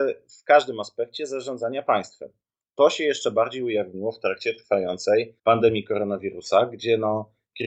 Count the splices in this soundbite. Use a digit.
1